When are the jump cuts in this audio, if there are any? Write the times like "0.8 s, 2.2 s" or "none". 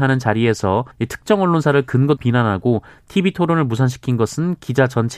0.9 s, 2.2 s